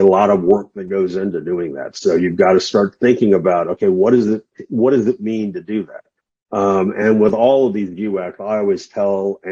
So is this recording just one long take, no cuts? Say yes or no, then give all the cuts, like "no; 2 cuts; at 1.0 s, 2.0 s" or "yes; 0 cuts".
yes; 0 cuts